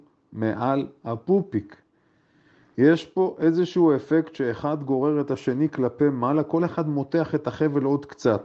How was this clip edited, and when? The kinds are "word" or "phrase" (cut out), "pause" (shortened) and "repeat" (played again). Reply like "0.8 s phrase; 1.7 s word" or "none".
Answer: none